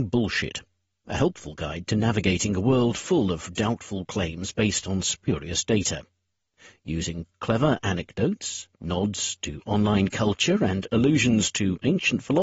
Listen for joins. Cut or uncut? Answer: uncut